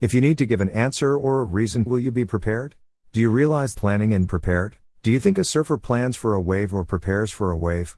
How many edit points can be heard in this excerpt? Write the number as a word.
five